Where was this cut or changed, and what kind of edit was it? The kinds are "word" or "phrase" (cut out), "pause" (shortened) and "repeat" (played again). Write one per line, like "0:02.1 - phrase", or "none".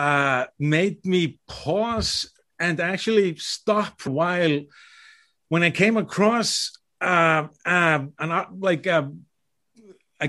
0:04.1 - word